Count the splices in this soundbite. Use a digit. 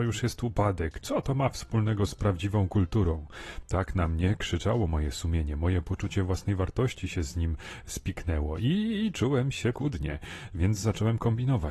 1